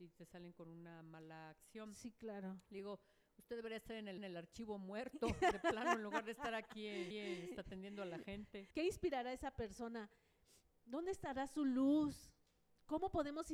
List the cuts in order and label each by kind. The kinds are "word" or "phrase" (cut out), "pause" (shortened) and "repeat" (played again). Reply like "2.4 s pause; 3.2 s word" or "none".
4.2 s repeat; 7.1 s repeat; 8.7 s pause